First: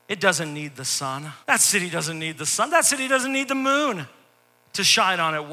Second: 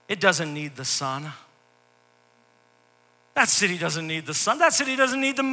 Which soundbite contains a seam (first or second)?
first